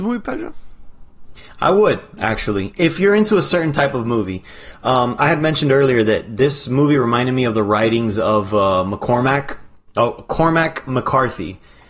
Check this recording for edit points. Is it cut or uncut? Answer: uncut